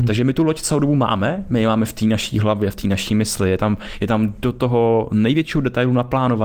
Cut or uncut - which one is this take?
uncut